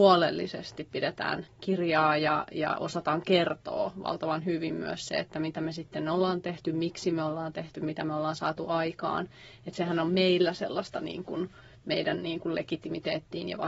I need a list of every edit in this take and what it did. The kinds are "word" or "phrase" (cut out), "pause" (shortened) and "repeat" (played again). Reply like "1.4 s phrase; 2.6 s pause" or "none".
none

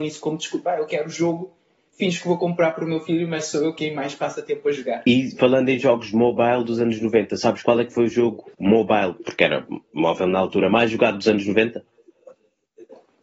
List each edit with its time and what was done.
none

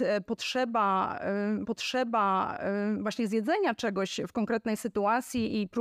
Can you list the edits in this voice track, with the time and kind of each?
1.6 s repeat

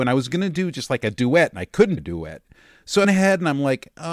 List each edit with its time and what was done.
2.0 s word; 3.0 s word

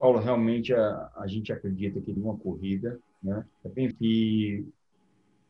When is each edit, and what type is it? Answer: 2.2 s word; 3.5 s pause; 3.9 s word

